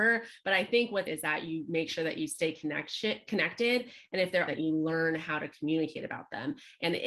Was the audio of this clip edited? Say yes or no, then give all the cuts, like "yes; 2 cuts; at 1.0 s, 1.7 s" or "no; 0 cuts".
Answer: yes; 2 cuts; at 1.1 s, 4.5 s